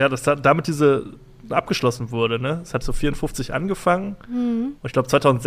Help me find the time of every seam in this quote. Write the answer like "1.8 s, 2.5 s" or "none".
1.5 s, 2.8 s